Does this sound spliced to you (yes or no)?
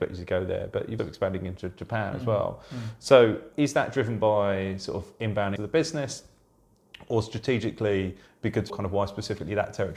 yes